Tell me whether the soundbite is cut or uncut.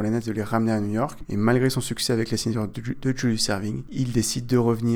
uncut